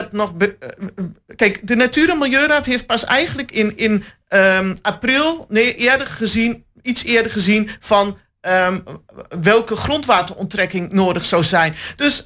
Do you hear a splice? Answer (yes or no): no